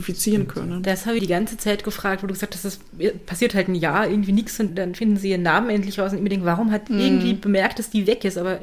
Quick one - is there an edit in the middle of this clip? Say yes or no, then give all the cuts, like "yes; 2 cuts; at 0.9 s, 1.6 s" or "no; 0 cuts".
yes; 3 cuts; at 1.2 s, 4.7 s, 6.9 s